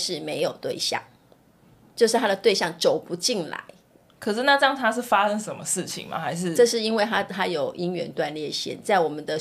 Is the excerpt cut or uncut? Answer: uncut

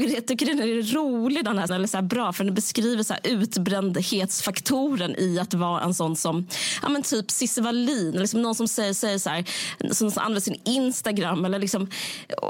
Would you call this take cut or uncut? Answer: cut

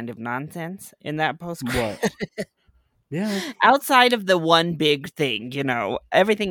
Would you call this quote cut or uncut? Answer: uncut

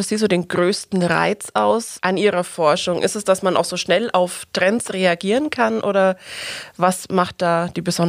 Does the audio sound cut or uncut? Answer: uncut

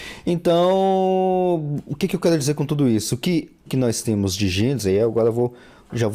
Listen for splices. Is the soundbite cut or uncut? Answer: cut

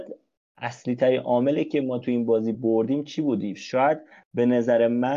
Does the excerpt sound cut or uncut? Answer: uncut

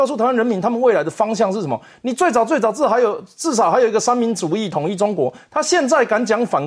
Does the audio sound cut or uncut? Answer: uncut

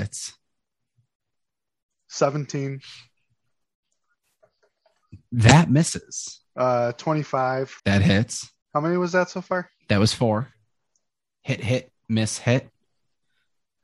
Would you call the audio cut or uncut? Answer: cut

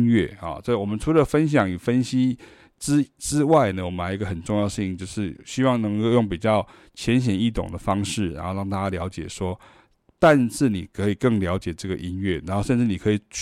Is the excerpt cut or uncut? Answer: cut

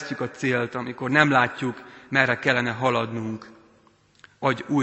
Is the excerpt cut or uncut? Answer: uncut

